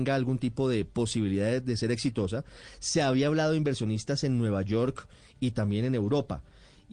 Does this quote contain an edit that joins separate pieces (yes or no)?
no